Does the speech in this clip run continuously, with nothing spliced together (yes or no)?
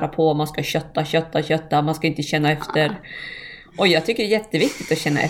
yes